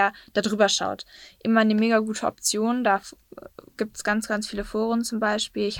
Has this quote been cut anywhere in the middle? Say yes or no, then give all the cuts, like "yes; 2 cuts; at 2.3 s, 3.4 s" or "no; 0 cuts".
no; 0 cuts